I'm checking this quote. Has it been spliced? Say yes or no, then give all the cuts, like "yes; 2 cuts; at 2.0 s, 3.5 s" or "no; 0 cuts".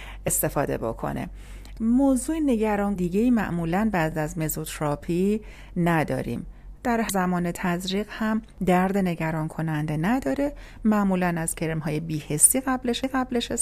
yes; 1 cut; at 3.0 s